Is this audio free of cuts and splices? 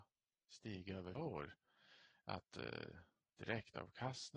no; 1 cut; at 1.1 s

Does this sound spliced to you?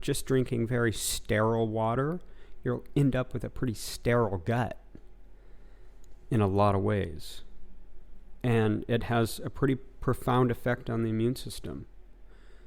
no; 0 cuts

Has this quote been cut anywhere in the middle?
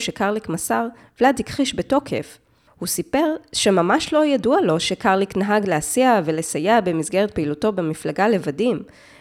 no; 0 cuts

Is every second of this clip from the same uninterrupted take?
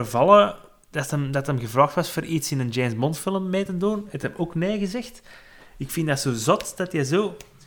yes; 0 cuts

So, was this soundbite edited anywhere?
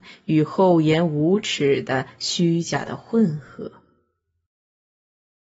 no; 0 cuts

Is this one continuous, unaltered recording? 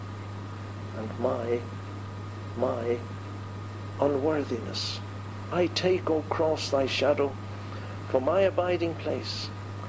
no; 1 cut; at 2.5 s

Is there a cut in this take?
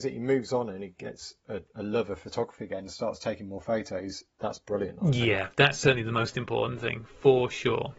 yes; 1 cut; at 5.5 s

